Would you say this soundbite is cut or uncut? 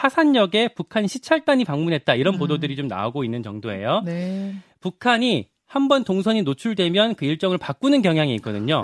uncut